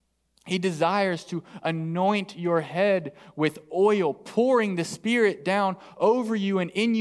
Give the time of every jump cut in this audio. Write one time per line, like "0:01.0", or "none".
none